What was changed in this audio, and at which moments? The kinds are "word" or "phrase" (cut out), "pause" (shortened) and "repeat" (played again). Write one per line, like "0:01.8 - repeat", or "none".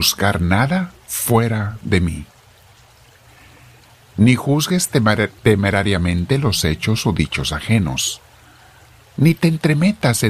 none